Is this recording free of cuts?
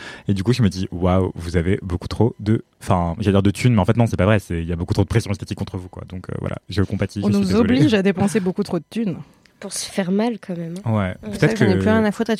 no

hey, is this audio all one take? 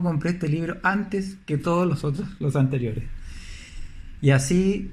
yes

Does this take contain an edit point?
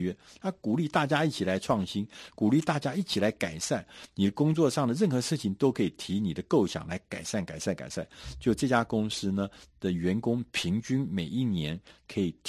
no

